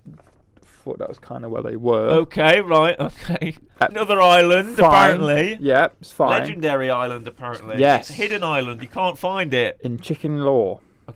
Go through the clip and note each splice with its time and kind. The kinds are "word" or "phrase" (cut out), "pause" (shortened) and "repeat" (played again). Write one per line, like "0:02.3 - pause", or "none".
0:03.9 - phrase